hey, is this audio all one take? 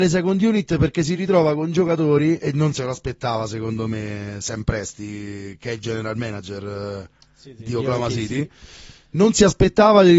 yes; 0 cuts

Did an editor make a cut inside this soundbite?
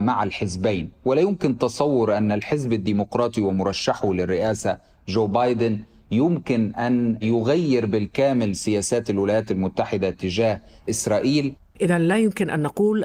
no; 0 cuts

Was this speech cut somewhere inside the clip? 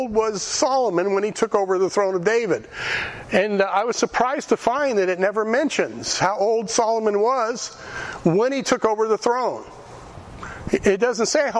no; 0 cuts

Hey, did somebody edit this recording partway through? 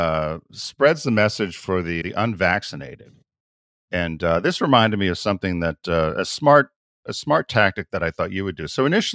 yes; 1 cut; at 2.0 s

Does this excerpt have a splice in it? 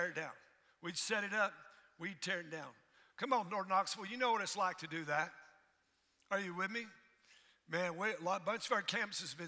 no; 0 cuts

